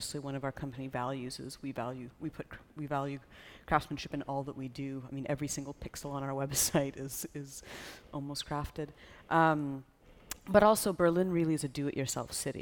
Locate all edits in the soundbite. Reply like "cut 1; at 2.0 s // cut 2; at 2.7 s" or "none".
none